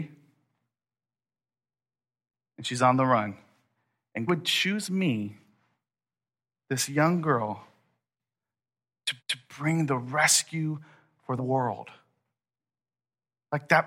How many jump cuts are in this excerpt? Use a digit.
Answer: 3